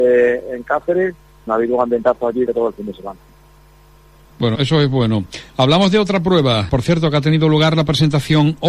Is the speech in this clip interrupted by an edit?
yes; 4 cuts; at 1.5 s, 2.5 s, 4.5 s, 6.7 s

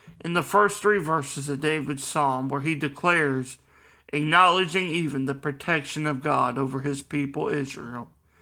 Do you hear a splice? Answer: no; 0 cuts

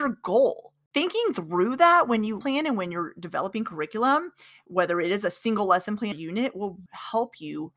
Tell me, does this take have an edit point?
yes; 3 cuts; at 2.4 s, 6.1 s, 6.9 s

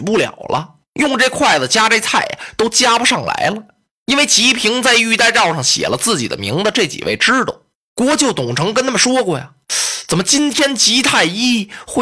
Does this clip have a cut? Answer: no; 0 cuts

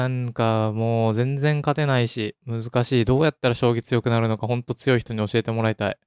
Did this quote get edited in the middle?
yes; 1 cut; at 2.4 s

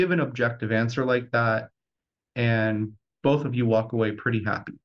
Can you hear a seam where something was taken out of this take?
no; 0 cuts

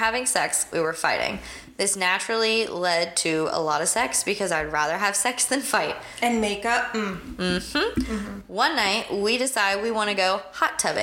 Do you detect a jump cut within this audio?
no; 0 cuts

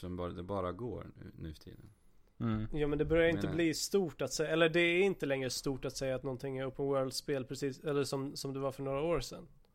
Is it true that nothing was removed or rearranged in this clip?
yes; 0 cuts

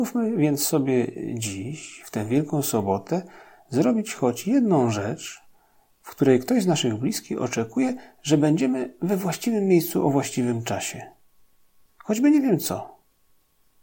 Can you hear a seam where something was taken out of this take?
no; 0 cuts

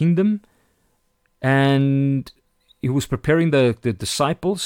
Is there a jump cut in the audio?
no; 0 cuts

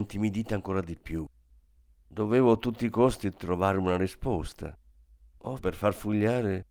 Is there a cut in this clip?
yes; 1 cut; at 5.6 s

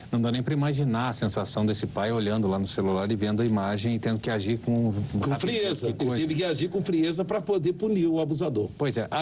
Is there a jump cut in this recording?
no; 0 cuts

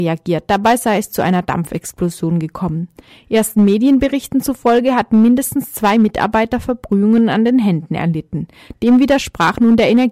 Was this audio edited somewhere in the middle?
no; 0 cuts

